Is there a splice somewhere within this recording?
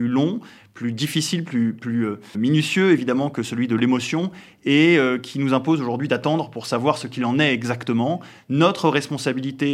yes; 1 cut; at 2.3 s

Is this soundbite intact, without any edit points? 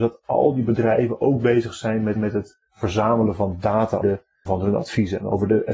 no; 3 cuts; at 2.2 s, 4.0 s, 4.5 s

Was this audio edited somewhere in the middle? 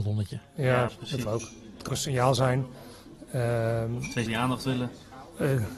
yes; 3 cuts; at 1.2 s, 1.9 s, 4.3 s

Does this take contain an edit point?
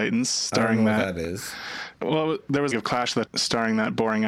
yes; 3 cuts; at 2.0 s, 2.7 s, 3.3 s

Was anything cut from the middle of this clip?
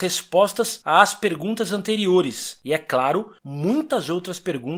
no; 0 cuts

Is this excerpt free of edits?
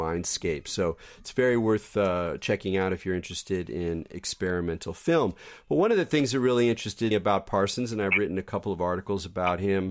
no; 1 cut; at 7.1 s

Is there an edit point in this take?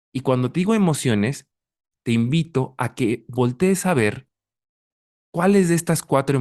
no; 0 cuts

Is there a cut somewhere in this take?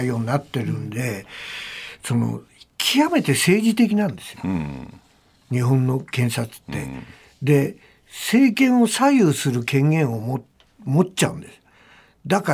no; 0 cuts

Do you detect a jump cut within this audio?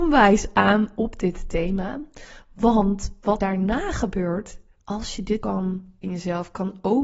yes; 3 cuts; at 3.4 s, 5.4 s, 6.0 s

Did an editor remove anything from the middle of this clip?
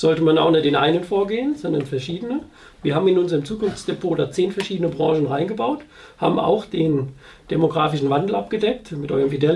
no; 0 cuts

